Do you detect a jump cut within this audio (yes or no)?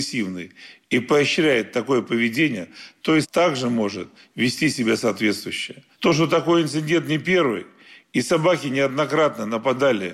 yes